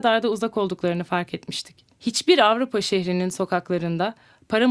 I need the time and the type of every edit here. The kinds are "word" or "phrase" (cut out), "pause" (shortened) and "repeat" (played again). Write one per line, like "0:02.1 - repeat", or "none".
0:01.9 - pause